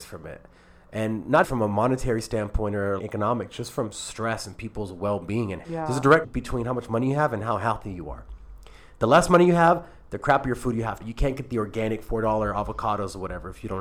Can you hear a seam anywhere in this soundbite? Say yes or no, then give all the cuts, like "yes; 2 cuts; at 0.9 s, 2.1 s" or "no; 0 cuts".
yes; 5 cuts; at 1.4 s, 3.0 s, 5.6 s, 6.2 s, 11.0 s